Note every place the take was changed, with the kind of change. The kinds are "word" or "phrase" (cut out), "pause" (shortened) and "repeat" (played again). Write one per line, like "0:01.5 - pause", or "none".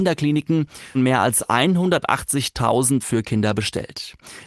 0:00.9 - word
0:03.0 - word